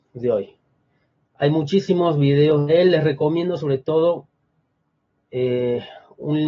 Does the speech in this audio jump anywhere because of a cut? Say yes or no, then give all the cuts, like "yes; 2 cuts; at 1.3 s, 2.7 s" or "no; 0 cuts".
no; 0 cuts